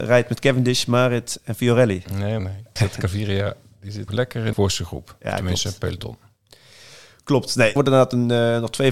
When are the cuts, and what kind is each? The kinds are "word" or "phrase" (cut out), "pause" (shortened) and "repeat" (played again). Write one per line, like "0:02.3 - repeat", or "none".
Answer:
0:02.4 - word
0:02.8 - word
0:04.1 - word
0:04.5 - word
0:07.8 - word